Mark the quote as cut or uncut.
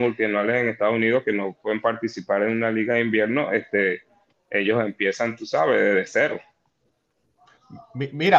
uncut